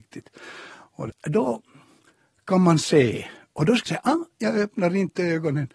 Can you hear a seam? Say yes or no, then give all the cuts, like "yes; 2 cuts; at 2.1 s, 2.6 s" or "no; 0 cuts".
yes; 2 cuts; at 1.1 s, 3.9 s